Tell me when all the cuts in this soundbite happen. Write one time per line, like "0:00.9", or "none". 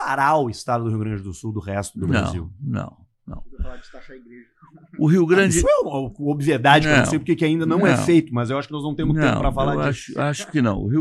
none